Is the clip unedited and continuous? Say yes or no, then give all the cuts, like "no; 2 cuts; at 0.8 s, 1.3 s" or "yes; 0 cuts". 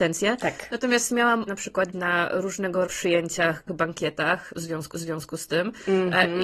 no; 5 cuts; at 1.5 s, 1.9 s, 2.9 s, 3.7 s, 4.9 s